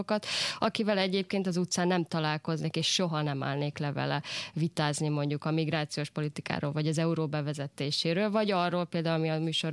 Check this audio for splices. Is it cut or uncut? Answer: uncut